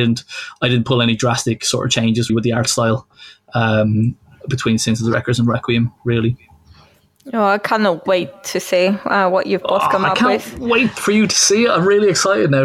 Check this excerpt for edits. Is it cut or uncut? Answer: cut